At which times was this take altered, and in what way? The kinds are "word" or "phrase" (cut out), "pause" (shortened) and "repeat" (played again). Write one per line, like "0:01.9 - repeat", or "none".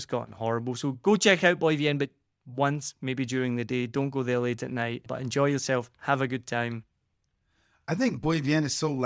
none